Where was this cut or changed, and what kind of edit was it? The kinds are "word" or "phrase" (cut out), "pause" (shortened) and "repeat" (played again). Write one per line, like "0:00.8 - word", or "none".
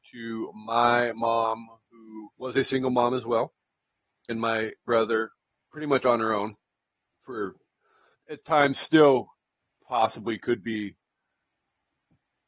0:02.3 - pause
0:04.3 - phrase
0:04.9 - word
0:05.4 - pause
0:08.1 - word